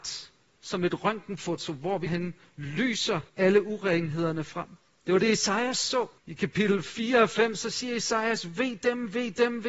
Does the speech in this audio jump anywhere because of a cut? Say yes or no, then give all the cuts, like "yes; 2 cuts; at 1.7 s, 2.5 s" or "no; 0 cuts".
yes; 3 cuts; at 2.1 s, 3.3 s, 6.2 s